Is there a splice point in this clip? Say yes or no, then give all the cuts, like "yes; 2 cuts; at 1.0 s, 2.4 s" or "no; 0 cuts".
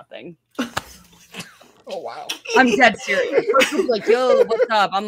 no; 0 cuts